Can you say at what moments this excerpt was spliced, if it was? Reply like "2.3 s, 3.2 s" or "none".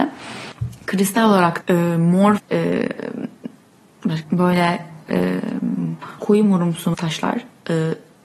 1.6 s, 2.4 s, 4.2 s, 6.2 s, 6.9 s